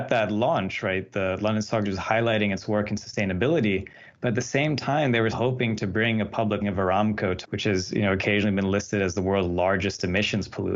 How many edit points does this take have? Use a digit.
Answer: 4